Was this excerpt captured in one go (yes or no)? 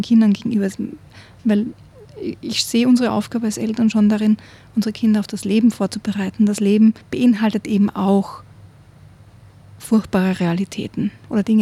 no